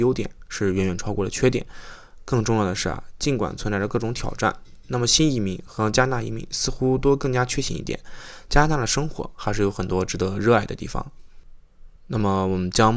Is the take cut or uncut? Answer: cut